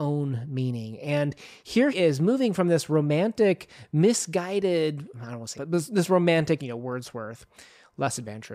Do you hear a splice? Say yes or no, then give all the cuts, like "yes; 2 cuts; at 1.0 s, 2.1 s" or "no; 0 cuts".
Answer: yes; 4 cuts; at 1.9 s, 5.1 s, 5.6 s, 6.6 s